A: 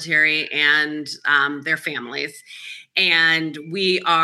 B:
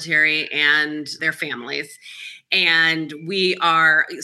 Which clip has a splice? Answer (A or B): B